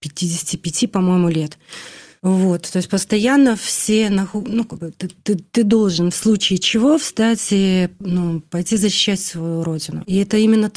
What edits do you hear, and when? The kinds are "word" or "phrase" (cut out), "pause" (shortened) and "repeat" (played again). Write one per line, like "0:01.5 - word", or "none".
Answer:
none

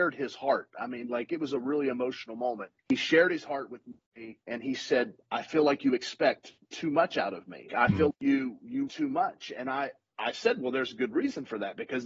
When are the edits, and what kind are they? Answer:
0:02.8 - pause
0:04.4 - pause
0:06.6 - pause
0:07.7 - word
0:08.1 - word
0:08.9 - word

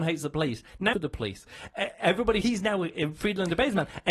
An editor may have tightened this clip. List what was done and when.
0:00.9 - phrase
0:02.4 - phrase

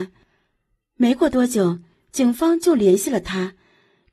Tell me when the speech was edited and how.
none

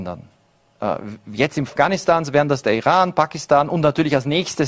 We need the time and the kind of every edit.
0:01.7 - word

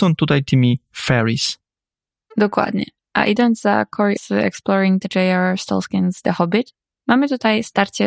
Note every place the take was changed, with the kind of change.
0:04.2 - word

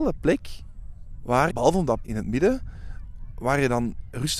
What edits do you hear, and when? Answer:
0:01.5 - word
0:02.0 - word

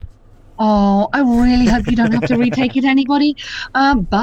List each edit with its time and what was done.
none

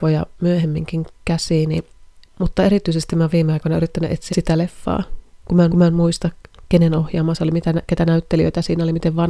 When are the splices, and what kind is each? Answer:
0:02.2 - pause
0:04.3 - word
0:05.7 - repeat

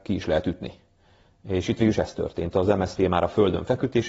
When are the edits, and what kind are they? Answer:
none

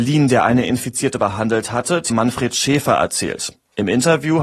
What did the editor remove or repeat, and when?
0:01.2 - word
0:02.1 - word

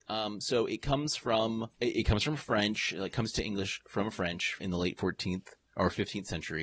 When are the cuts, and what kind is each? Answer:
0:01.7 - pause
0:04.6 - word

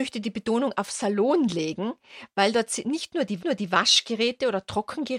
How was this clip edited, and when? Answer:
0:03.4 - repeat

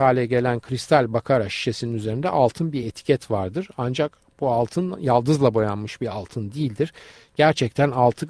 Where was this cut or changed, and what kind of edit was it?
none

